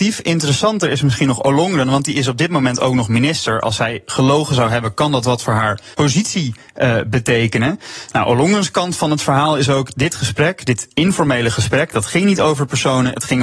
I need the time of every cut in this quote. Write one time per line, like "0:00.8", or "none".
0:05.9

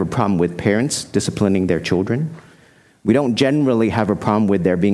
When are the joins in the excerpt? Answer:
none

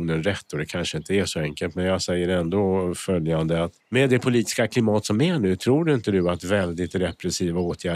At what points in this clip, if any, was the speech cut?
0:03.8

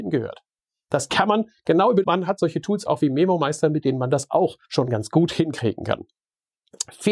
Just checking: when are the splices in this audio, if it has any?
0:02.0
0:04.6

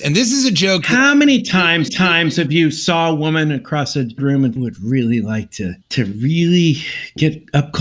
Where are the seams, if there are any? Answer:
0:01.9
0:04.2
0:04.6
0:05.8

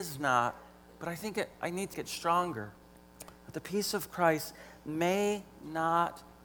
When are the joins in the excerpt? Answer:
0:01.9

